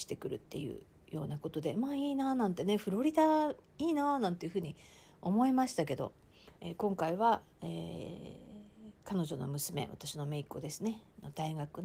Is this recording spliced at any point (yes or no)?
yes